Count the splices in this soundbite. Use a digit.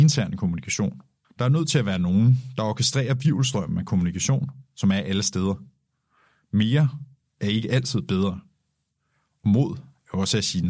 1